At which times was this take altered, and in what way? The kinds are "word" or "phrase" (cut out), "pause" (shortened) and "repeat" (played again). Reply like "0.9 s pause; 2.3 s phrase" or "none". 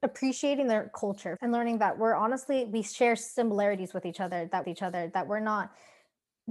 1.4 s word; 4.6 s repeat